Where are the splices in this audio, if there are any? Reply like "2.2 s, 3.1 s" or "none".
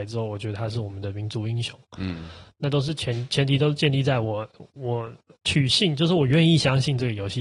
none